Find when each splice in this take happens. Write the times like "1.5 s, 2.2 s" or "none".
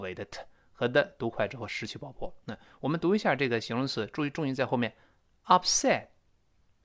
none

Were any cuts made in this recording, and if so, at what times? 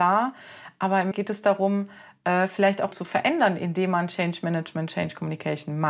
1.1 s, 2.9 s

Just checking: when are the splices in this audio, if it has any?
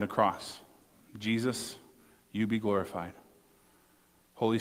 none

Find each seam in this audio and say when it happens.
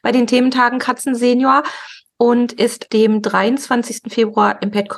2.9 s

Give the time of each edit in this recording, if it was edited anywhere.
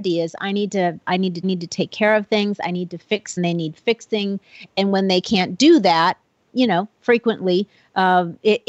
1.4 s, 3.4 s, 6.4 s

